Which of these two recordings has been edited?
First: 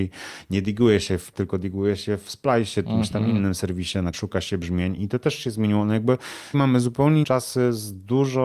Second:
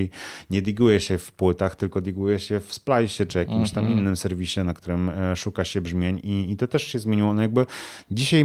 first; 6 cuts; at 1.3 s, 2.8 s, 4.1 s, 5.0 s, 6.5 s, 7.2 s

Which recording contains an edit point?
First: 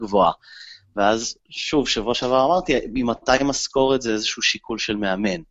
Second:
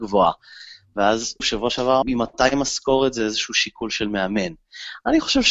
second; 2 cuts; at 1.4 s, 2.0 s

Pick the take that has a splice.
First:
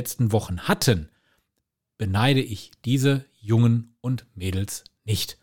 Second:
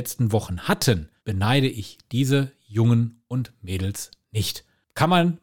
second; 1 cut; at 1.2 s

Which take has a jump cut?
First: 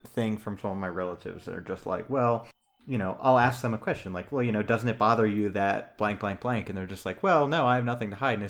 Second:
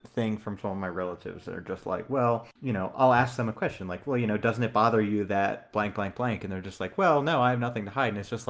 second; 1 cut; at 2.6 s

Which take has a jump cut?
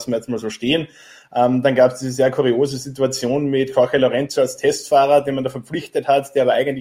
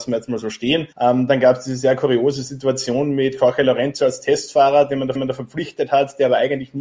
second; 2 cuts; at 0.9 s, 5.2 s

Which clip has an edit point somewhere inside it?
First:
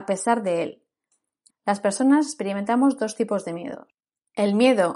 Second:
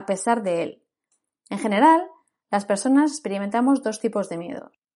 first; 1 cut; at 1.5 s

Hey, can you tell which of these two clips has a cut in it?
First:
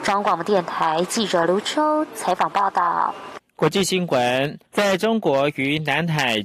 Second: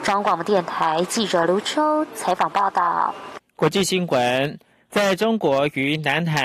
first; 1 cut; at 4.6 s

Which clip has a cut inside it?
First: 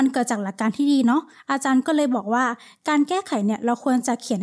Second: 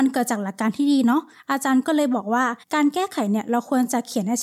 second; 1 cut; at 2.6 s

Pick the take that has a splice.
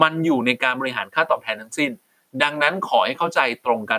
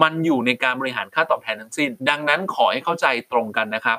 second; 1 cut; at 2.0 s

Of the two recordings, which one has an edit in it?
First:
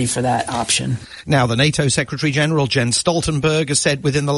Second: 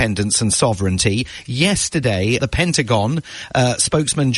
second; 1 cut; at 2.4 s

